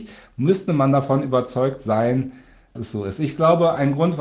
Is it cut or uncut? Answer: cut